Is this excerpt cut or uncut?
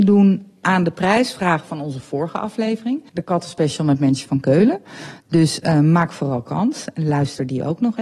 cut